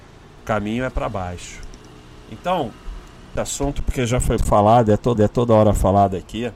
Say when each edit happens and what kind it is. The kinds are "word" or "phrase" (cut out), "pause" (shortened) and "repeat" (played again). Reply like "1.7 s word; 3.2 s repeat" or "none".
3.4 s phrase; 4.4 s word; 5.2 s repeat

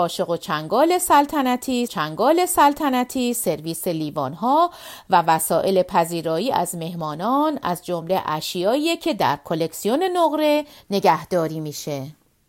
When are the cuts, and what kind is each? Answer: 1.9 s repeat

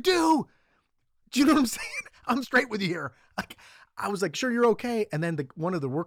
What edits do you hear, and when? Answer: 2.4 s word; 4.3 s word

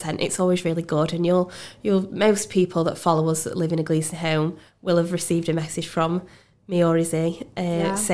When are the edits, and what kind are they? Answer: none

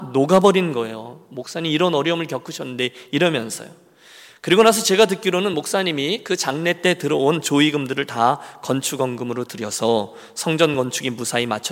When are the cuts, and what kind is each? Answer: none

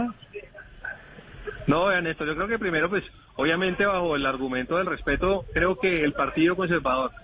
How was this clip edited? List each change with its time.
none

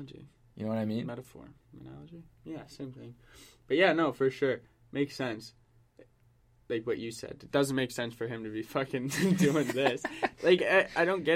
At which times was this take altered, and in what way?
none

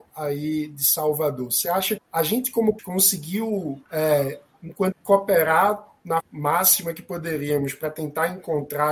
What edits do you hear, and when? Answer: 2.0 s word; 2.8 s word; 3.9 s pause; 4.9 s phrase; 6.2 s word

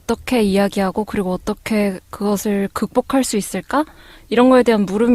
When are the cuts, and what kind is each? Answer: none

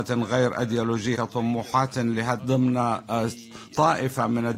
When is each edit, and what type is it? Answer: 1.1 s word; 2.4 s word

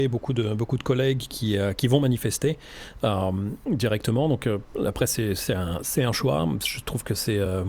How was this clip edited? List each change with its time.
none

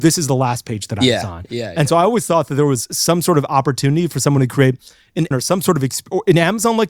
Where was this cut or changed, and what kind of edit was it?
5.3 s word

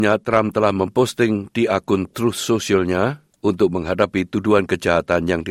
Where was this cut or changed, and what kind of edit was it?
none

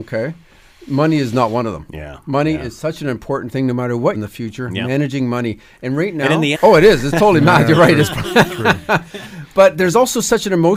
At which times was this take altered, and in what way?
4.1 s phrase; 6.5 s phrase

